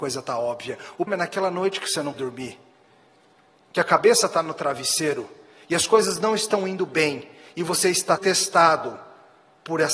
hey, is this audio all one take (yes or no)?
no